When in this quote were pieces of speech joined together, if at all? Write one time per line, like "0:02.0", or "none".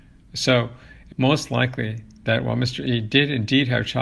0:01.1